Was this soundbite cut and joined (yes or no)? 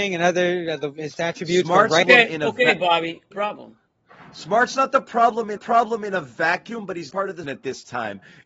yes